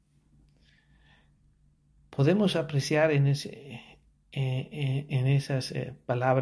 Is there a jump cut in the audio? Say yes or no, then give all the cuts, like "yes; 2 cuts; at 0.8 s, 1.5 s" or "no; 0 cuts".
no; 0 cuts